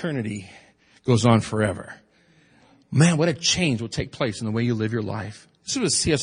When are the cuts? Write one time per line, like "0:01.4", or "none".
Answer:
none